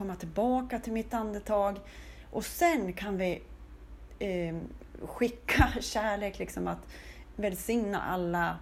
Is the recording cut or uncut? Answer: uncut